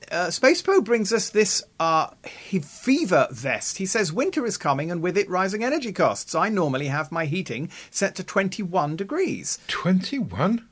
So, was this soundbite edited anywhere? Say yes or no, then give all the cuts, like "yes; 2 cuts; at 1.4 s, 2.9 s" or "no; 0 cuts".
no; 0 cuts